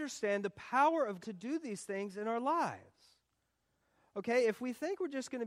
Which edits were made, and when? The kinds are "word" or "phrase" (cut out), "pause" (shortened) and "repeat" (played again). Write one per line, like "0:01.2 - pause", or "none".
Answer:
0:01.2 - word